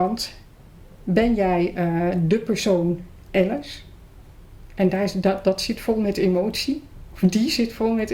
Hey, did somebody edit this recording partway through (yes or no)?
no